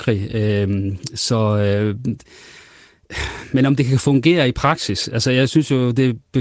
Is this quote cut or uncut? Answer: uncut